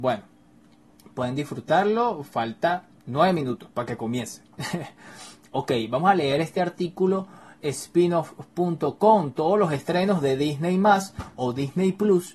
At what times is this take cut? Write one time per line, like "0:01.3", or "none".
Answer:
0:03.0
0:07.6